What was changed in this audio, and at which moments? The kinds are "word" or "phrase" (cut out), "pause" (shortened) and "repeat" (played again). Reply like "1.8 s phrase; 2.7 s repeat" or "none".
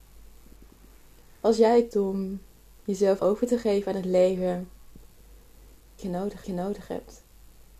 1.9 s word; 3.2 s word; 6.0 s phrase; 6.4 s repeat